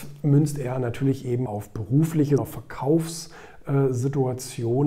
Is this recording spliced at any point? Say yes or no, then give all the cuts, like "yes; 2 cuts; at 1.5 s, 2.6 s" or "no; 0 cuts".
yes; 2 cuts; at 1.5 s, 2.4 s